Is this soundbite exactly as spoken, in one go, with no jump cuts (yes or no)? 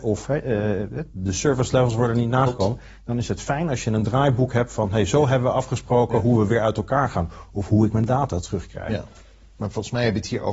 yes